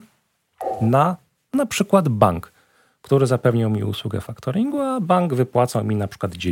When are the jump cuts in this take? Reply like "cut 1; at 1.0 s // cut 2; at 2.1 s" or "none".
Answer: none